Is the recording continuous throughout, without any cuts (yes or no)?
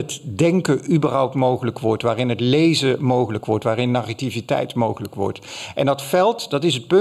yes